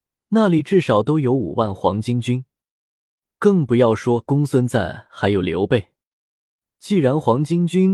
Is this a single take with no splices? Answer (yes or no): yes